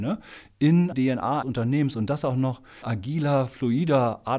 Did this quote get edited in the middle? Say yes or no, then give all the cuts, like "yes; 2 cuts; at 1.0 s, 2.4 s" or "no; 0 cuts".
yes; 3 cuts; at 0.9 s, 1.4 s, 2.8 s